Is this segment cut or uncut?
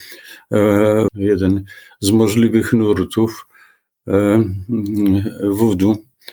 cut